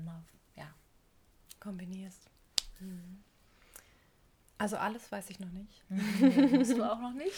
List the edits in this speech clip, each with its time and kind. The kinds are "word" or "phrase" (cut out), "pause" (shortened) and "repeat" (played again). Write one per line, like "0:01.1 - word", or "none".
none